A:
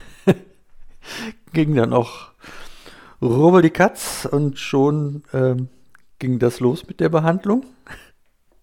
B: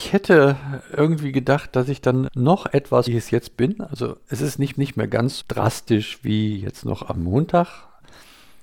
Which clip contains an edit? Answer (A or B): B